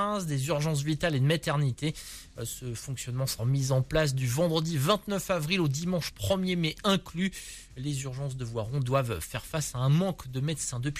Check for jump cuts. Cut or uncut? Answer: cut